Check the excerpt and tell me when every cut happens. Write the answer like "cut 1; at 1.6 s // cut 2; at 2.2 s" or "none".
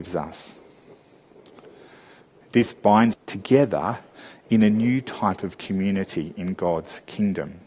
cut 1; at 3.1 s